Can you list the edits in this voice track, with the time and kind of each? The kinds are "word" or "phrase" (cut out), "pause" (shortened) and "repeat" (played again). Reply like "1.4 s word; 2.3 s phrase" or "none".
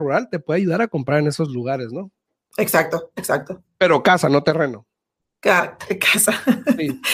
none